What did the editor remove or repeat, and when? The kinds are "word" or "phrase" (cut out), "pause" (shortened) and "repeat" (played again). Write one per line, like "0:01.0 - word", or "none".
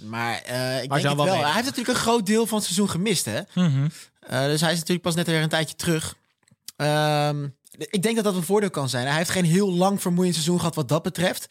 0:07.6 - pause